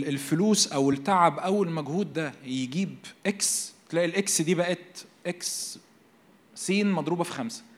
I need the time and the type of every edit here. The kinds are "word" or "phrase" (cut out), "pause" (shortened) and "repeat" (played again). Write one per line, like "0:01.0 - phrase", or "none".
none